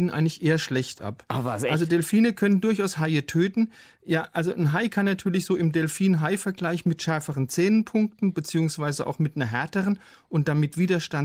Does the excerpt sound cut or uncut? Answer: uncut